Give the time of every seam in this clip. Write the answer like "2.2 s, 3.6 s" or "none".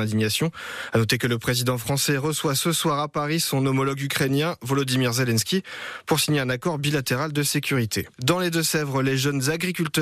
8.1 s